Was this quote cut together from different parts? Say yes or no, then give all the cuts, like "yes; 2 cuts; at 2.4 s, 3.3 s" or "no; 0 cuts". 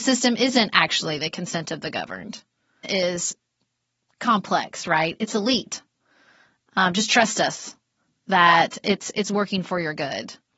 yes; 2 cuts; at 2.8 s, 9.1 s